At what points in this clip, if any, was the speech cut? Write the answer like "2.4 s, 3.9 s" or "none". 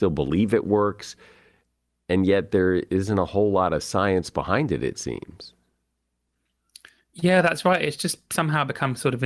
none

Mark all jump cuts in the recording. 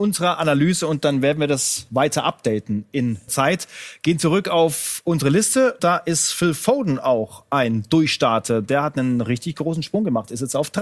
3.3 s, 5.8 s

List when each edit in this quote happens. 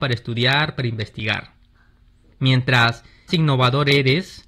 3.3 s

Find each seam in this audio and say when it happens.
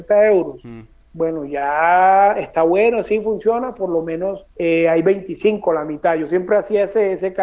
4.5 s

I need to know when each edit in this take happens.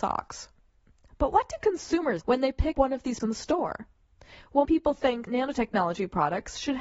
2.2 s, 2.7 s, 3.2 s, 4.6 s, 5.3 s

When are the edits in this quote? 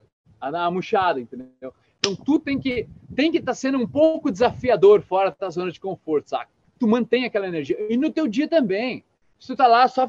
6.8 s

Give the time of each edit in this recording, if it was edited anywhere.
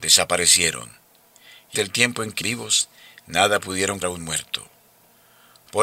1.8 s, 2.4 s, 4.0 s

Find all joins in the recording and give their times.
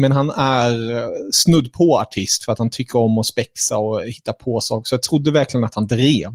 none

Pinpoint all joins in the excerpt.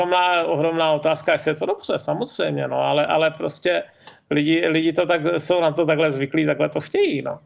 none

